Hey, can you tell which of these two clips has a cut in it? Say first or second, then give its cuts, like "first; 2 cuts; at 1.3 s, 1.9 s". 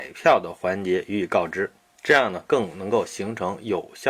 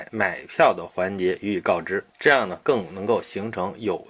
second; 1 cut; at 2.1 s